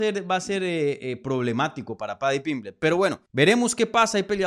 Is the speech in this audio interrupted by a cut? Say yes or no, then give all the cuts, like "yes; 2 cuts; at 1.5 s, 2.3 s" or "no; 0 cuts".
yes; 1 cut; at 3.3 s